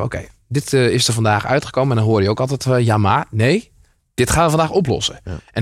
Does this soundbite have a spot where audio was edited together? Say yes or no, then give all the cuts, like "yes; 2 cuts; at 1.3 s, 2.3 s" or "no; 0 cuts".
no; 0 cuts